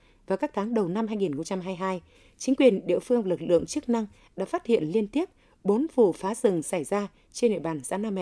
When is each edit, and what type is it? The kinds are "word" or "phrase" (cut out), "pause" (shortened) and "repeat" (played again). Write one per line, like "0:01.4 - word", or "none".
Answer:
none